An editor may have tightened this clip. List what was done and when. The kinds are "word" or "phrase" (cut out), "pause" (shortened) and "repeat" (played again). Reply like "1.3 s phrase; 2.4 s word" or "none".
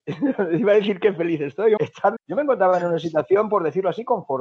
1.8 s word; 2.2 s phrase

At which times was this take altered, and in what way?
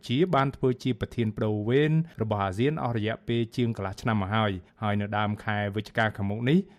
4.7 s pause

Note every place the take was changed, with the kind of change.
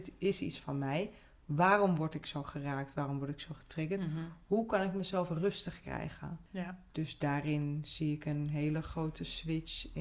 none

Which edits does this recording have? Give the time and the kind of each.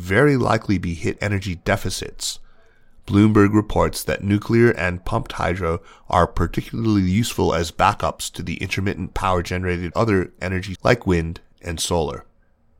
1.2 s word; 9.9 s word; 10.4 s word; 10.8 s word

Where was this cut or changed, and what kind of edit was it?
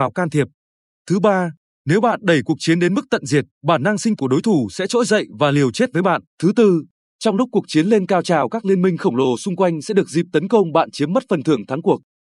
3.5 s pause; 4.2 s word; 6.3 s pause

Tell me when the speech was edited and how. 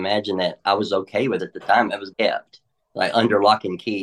1.4 s word; 2.1 s word

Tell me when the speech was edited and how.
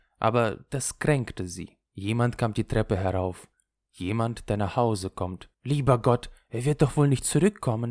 1.9 s pause; 5.5 s pause

